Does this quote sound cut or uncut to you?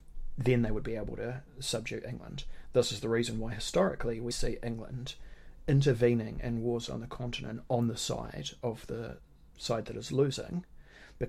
cut